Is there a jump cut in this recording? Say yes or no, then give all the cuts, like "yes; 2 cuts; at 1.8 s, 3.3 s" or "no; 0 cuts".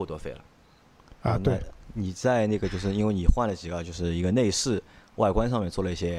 no; 0 cuts